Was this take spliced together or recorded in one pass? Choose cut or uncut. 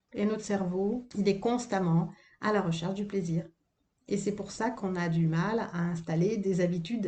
uncut